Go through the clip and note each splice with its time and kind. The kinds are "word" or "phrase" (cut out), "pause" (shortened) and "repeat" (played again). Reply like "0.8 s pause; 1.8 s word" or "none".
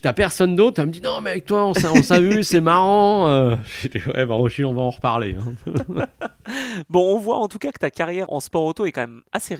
8.3 s word